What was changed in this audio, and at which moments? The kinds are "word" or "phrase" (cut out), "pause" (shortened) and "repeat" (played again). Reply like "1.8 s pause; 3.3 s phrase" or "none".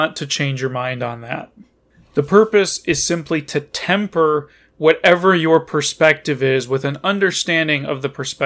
none